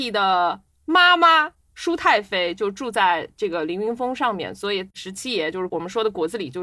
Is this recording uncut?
yes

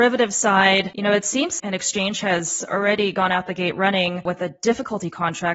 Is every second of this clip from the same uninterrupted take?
no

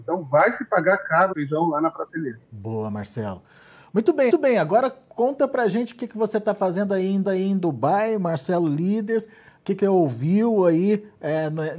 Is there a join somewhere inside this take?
yes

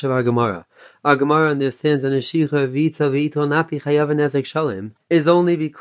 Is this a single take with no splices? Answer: yes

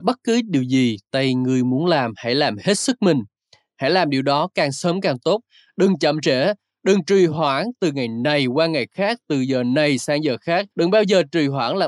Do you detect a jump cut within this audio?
yes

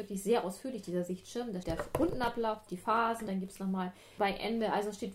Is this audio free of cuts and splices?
no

